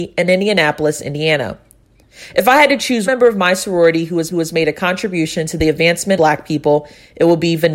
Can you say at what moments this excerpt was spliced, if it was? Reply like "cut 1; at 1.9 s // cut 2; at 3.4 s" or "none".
cut 1; at 3.1 s // cut 2; at 4.3 s // cut 3; at 6.2 s